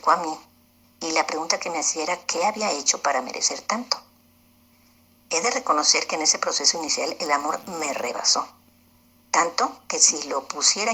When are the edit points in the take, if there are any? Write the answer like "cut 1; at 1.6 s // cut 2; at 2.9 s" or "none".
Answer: none